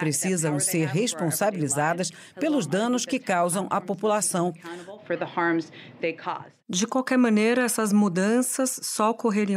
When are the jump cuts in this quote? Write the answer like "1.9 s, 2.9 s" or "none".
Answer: none